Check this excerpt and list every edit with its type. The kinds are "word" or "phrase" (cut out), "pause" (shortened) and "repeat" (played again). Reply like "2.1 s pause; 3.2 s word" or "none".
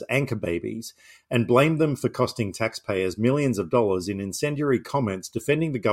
none